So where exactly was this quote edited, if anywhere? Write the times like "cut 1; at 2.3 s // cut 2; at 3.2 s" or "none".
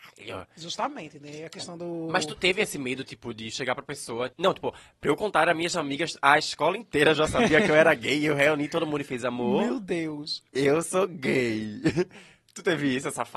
cut 1; at 4.3 s // cut 2; at 10.5 s

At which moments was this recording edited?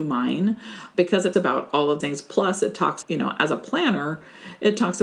cut 1; at 1.3 s // cut 2; at 2.0 s // cut 3; at 3.0 s

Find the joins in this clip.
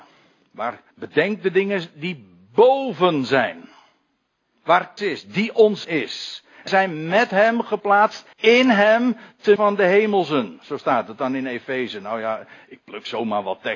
cut 1; at 0.9 s // cut 2; at 5.0 s // cut 3; at 5.8 s // cut 4; at 6.7 s // cut 5; at 8.3 s // cut 6; at 9.6 s

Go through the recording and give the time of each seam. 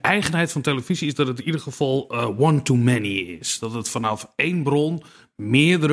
none

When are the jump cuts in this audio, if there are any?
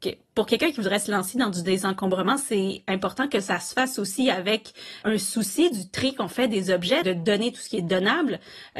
cut 1; at 5.0 s // cut 2; at 7.0 s

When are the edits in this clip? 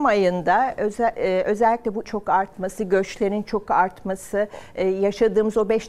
cut 1; at 2.0 s

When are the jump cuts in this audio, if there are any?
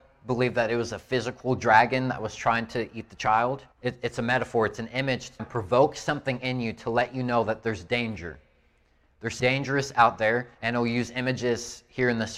cut 1; at 3.7 s // cut 2; at 5.4 s // cut 3; at 9.4 s // cut 4; at 10.5 s

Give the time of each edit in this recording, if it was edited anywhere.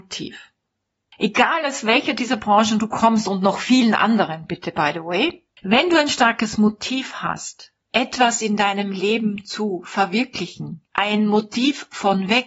cut 1; at 10.8 s

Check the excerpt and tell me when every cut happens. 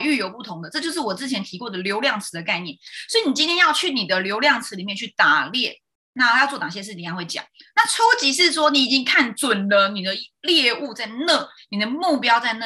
none

